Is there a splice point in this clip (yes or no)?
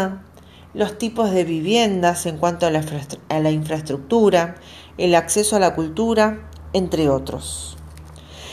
no